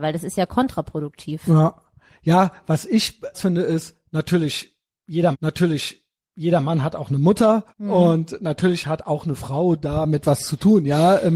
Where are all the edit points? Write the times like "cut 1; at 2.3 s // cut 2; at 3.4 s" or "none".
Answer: cut 1; at 3.3 s // cut 2; at 5.3 s // cut 3; at 7.7 s